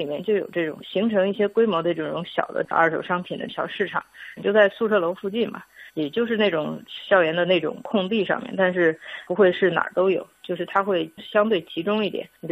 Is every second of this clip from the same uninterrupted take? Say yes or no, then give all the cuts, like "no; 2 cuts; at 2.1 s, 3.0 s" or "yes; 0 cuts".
no; 1 cut; at 5.9 s